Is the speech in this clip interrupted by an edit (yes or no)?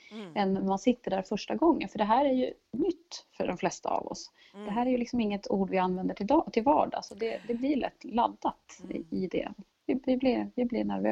no